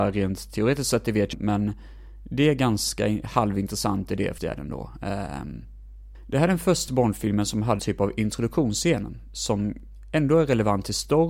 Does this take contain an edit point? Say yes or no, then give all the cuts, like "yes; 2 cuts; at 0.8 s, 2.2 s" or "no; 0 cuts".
yes; 4 cuts; at 1.3 s, 4.4 s, 6.9 s, 7.8 s